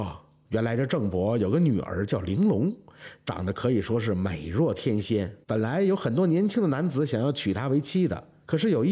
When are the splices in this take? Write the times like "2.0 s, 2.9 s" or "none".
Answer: 5.4 s